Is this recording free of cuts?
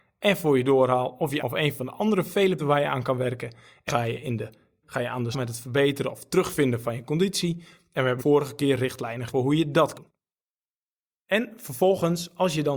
no; 8 cuts; at 1.4 s, 2.6 s, 3.9 s, 4.8 s, 5.3 s, 8.2 s, 9.3 s, 9.9 s

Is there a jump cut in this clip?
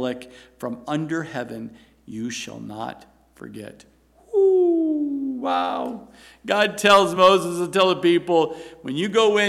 no; 0 cuts

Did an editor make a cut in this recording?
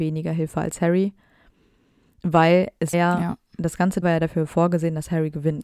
yes; 2 cuts; at 2.9 s, 4.0 s

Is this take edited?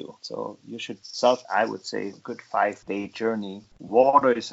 yes; 3 cuts; at 1.0 s, 1.4 s, 2.1 s

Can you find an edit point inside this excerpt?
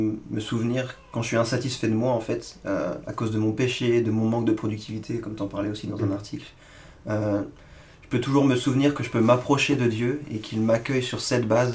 no; 0 cuts

